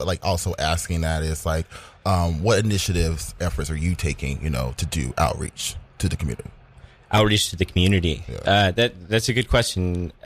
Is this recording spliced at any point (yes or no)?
yes